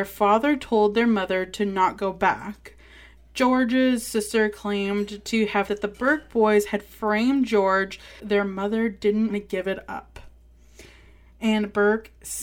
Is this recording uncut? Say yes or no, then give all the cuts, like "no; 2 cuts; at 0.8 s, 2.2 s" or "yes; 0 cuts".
no; 3 cuts; at 5.7 s, 8.2 s, 9.3 s